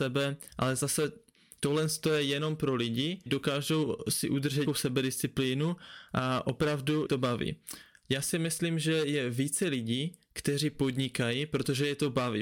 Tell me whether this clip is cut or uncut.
cut